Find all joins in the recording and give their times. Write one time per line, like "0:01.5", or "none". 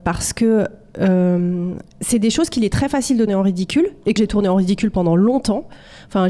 0:01.9
0:03.3
0:04.2